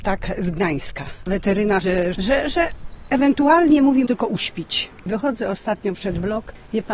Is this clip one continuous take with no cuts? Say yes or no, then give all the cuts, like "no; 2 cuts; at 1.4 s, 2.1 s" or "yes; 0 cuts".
no; 4 cuts; at 1.8 s, 2.2 s, 4.1 s, 5.9 s